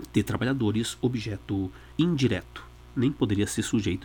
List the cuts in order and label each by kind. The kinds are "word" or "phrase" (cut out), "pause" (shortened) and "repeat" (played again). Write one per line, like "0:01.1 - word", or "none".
0:01.9 - pause